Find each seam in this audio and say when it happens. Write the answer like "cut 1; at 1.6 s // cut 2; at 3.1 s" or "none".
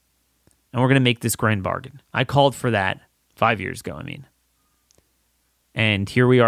cut 1; at 2.0 s // cut 2; at 3.2 s